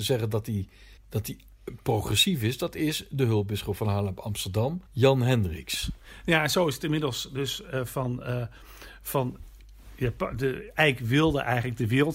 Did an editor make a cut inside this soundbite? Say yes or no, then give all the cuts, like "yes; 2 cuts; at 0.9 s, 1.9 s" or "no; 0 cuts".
yes; 2 cuts; at 1.0 s, 4.9 s